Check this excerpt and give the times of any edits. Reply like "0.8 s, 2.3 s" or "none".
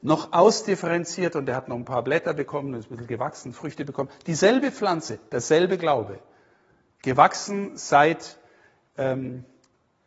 none